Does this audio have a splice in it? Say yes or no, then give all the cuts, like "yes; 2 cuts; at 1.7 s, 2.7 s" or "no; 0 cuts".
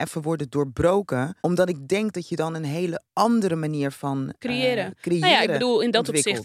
yes; 2 cuts; at 1.4 s, 3.1 s